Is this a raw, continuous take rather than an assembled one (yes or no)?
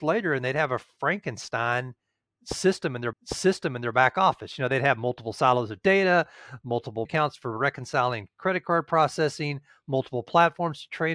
no